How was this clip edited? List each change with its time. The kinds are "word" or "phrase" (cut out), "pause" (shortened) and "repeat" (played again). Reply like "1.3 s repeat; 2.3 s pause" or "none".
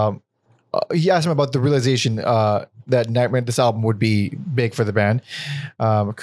none

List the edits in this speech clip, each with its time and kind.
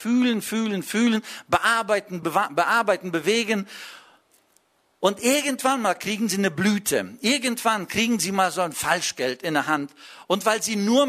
2.2 s word

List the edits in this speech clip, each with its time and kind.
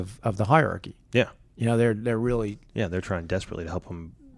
1.0 s pause

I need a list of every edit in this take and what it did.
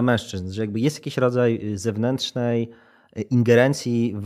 none

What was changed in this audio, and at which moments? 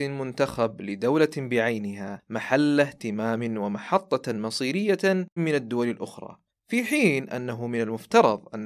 5.4 s word; 6.5 s pause

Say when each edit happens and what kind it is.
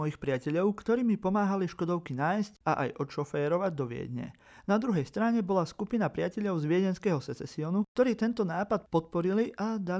2.6 s pause

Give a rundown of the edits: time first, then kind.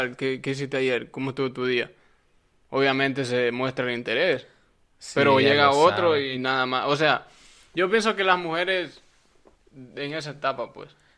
none

